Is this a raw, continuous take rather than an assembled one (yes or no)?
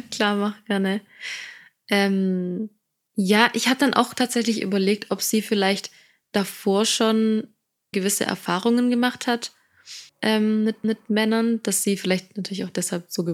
no